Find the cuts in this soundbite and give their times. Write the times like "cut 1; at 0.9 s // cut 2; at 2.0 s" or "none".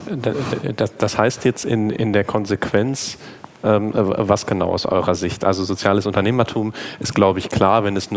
none